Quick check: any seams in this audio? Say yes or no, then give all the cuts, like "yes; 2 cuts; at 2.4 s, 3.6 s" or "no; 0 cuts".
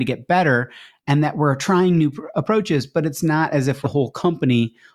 yes; 1 cut; at 3.8 s